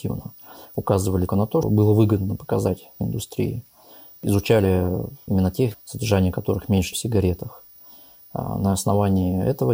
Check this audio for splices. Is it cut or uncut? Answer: cut